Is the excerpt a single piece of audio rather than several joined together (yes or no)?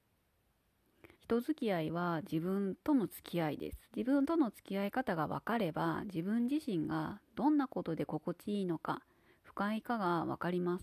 no